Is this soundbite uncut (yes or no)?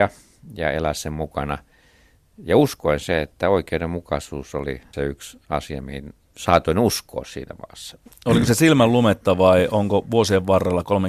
yes